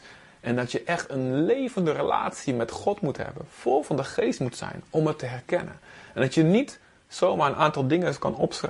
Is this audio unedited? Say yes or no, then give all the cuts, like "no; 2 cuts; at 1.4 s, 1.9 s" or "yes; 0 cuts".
yes; 0 cuts